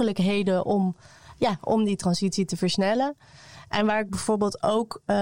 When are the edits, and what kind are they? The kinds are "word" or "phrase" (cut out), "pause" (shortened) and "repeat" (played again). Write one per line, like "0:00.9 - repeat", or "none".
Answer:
none